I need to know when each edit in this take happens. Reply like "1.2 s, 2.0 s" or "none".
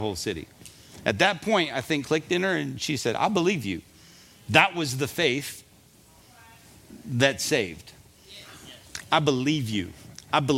2.0 s